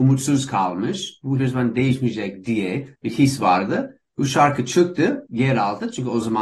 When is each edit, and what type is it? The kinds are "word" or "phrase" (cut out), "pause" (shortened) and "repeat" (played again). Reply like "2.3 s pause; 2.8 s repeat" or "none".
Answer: 1.4 s word; 2.9 s pause; 5.3 s word